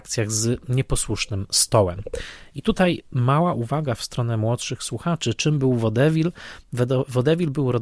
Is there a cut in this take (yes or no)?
no